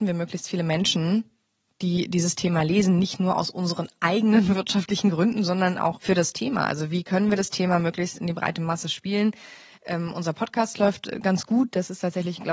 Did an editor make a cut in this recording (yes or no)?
yes